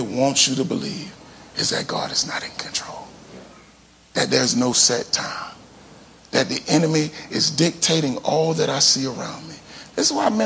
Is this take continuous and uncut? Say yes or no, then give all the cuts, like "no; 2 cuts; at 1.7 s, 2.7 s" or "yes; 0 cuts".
yes; 0 cuts